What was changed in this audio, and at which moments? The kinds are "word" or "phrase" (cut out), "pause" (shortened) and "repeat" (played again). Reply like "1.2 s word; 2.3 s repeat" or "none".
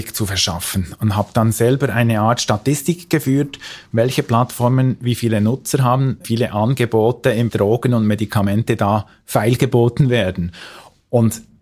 6.2 s word; 7.5 s word